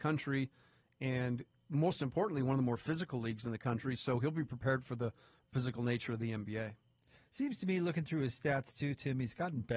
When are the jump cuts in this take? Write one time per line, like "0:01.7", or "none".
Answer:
none